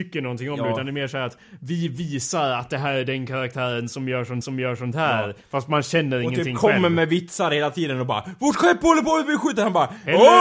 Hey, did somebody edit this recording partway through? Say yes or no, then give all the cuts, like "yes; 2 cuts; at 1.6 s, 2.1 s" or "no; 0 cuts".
yes; 1 cut; at 4.4 s